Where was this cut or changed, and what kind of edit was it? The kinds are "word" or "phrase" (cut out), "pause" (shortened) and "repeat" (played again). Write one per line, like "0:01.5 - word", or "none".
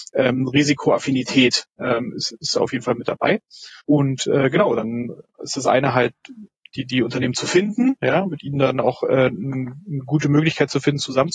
0:03.8 - pause
0:05.3 - pause